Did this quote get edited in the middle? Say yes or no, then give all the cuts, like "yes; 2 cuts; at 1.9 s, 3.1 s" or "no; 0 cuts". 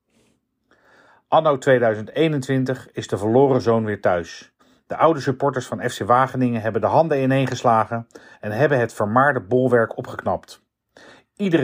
yes; 1 cut; at 4.6 s